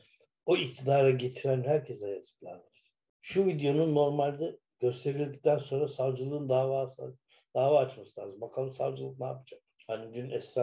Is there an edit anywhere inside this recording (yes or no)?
no